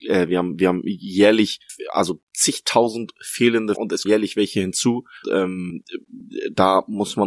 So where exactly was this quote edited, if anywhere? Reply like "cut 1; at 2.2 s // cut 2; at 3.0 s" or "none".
cut 1; at 2.3 s // cut 2; at 3.7 s // cut 3; at 4.0 s // cut 4; at 5.2 s

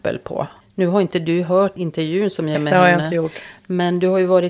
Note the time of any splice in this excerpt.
cut 1; at 2.5 s

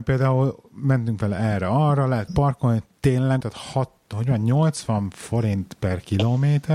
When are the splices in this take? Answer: cut 1; at 2.3 s // cut 2; at 3.4 s

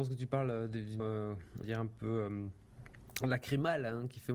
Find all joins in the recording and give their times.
cut 1; at 1.0 s // cut 2; at 1.6 s

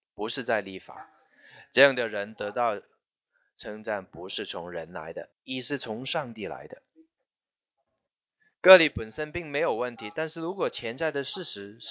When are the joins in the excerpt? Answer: cut 1; at 5.3 s

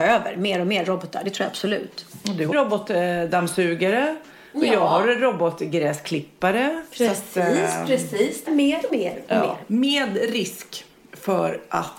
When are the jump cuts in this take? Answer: cut 1; at 2.5 s // cut 2; at 8.5 s // cut 3; at 8.9 s

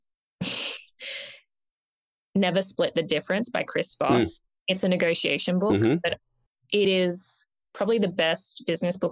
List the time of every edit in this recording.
none

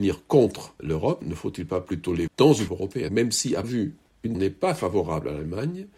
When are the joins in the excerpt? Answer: cut 1; at 1.2 s // cut 2; at 2.3 s // cut 3; at 2.7 s // cut 4; at 3.1 s // cut 5; at 3.6 s // cut 6; at 4.3 s

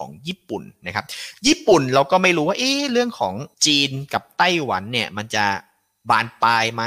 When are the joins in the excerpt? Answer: cut 1; at 3.5 s

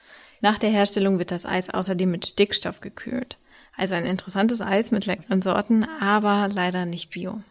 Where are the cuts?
none

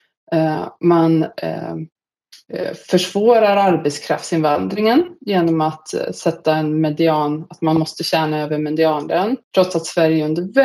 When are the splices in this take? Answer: cut 1; at 9.4 s

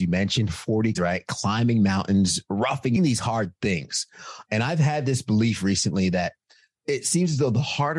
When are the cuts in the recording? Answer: cut 1; at 0.9 s // cut 2; at 3.0 s

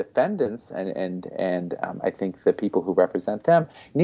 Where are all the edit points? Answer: none

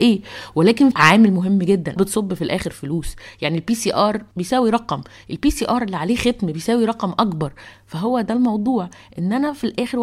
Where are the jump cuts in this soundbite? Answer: cut 1; at 0.9 s // cut 2; at 2.0 s

